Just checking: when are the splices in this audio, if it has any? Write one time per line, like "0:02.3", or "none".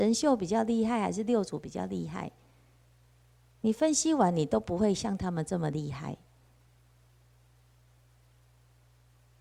none